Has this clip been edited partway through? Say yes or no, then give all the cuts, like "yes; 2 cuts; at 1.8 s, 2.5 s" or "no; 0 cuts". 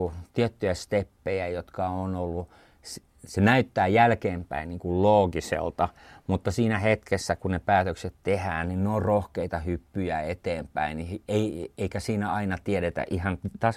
no; 0 cuts